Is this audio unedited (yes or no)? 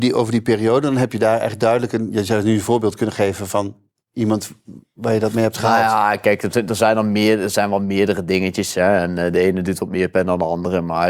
yes